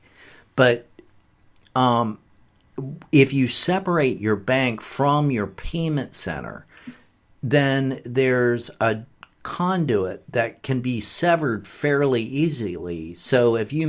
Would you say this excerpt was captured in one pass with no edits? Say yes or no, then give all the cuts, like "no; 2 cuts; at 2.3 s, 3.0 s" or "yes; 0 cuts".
yes; 0 cuts